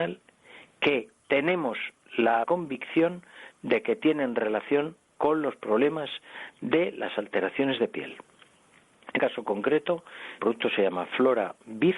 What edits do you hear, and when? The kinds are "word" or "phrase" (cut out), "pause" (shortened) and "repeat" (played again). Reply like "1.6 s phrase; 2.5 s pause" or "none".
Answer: 2.4 s word; 9.2 s word; 10.4 s word